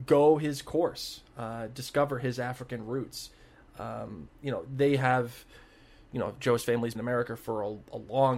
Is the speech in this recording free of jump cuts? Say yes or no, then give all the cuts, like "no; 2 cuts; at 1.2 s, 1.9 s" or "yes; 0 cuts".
no; 1 cut; at 6.9 s